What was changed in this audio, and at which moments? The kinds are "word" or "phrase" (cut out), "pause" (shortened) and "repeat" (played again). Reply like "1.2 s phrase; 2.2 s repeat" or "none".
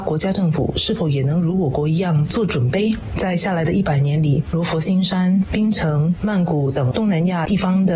5.5 s phrase